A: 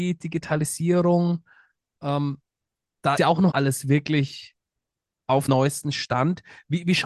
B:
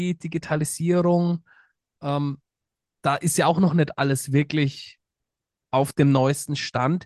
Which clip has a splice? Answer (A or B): A